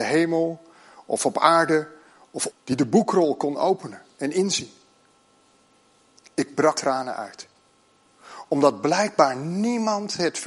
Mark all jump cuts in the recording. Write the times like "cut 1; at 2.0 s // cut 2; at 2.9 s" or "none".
cut 1; at 2.5 s // cut 2; at 6.7 s